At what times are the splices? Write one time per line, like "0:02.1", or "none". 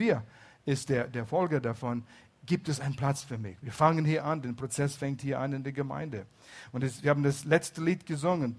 none